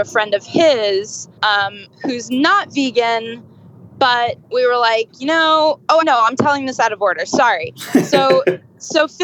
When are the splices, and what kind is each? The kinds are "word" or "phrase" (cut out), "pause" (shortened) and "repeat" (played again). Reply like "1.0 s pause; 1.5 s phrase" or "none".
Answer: 1.4 s pause; 4.4 s pause; 6.0 s word